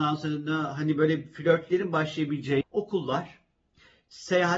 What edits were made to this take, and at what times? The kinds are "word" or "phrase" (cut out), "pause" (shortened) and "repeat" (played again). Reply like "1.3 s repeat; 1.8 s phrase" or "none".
2.6 s word